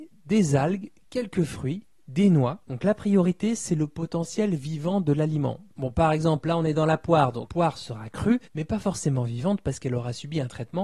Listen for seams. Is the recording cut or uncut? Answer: cut